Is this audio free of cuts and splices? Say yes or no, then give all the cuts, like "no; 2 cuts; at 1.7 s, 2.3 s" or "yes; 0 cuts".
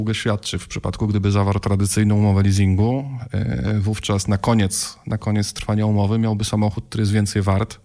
yes; 0 cuts